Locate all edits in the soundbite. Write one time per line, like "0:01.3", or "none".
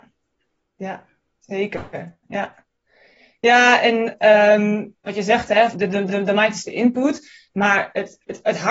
0:05.7
0:06.1